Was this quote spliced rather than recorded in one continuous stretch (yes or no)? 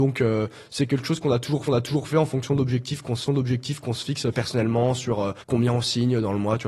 yes